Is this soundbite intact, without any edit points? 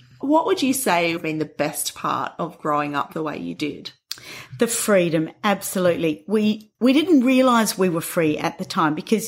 no; 2 cuts; at 1.2 s, 6.7 s

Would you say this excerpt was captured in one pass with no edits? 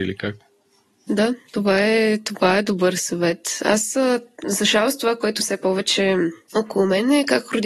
no; 1 cut; at 5.4 s

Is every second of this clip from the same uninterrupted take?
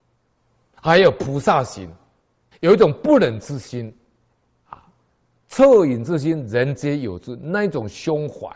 no; 1 cut; at 2.5 s

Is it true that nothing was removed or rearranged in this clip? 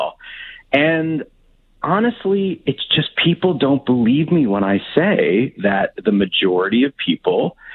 yes; 0 cuts

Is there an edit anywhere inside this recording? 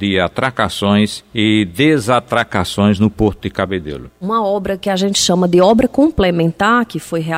no; 0 cuts

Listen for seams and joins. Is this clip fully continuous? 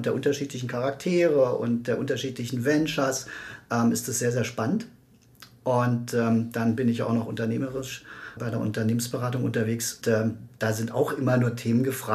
no; 2 cuts; at 8.4 s, 10.0 s

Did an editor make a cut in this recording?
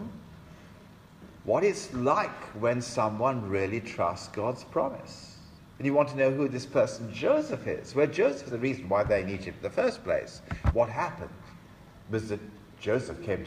yes; 1 cut; at 8.5 s

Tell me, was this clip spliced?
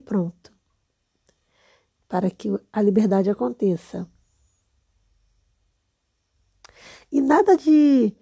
no; 0 cuts

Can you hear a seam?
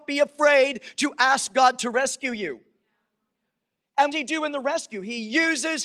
yes; 1 cut; at 4.1 s

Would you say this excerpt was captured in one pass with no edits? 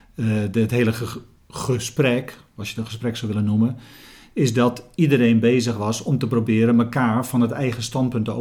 yes; 0 cuts

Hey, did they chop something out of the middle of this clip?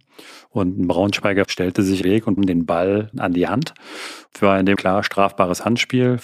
yes; 6 cuts; at 1.4 s, 2.0 s, 2.4 s, 3.1 s, 4.4 s, 4.8 s

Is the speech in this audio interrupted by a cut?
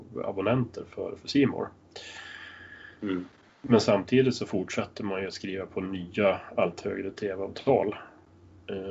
no; 0 cuts

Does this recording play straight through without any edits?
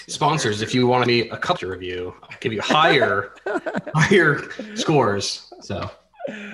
no; 2 cuts; at 1.1 s, 1.6 s

